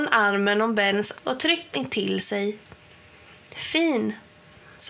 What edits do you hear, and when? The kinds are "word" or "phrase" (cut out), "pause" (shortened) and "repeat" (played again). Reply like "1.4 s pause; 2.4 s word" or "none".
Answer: 1.1 s word; 1.7 s word

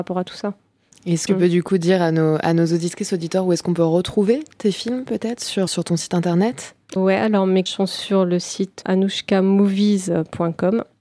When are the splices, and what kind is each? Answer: 1.3 s word; 5.7 s word; 7.0 s word; 7.7 s word; 8.8 s word

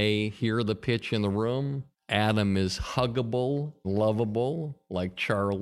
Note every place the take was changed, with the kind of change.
1.9 s pause; 3.8 s word

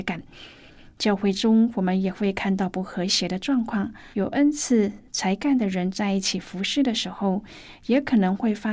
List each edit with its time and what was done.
4.1 s pause

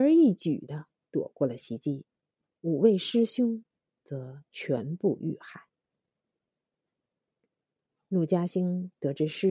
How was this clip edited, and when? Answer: none

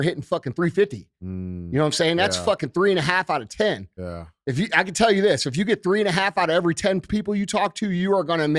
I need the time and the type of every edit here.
7.1 s word

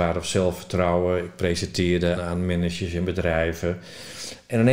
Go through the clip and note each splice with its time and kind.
2.2 s word

